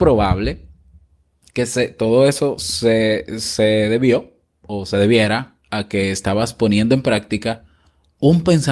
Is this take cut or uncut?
uncut